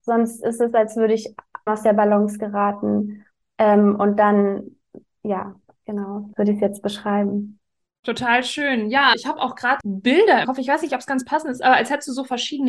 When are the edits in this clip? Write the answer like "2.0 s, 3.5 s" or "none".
1.7 s, 6.3 s, 9.1 s, 9.8 s, 10.4 s